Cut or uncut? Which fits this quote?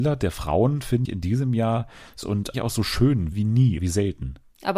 cut